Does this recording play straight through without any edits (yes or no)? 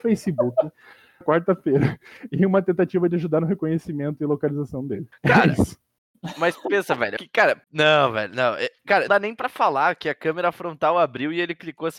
no